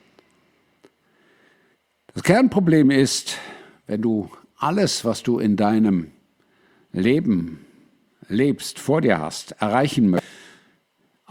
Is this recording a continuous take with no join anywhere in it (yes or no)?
yes